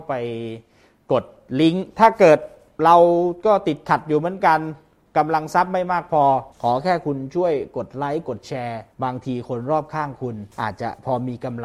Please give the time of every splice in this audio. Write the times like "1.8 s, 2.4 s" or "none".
6.5 s, 8.9 s, 10.5 s